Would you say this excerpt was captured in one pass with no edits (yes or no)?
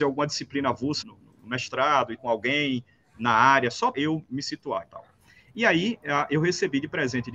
no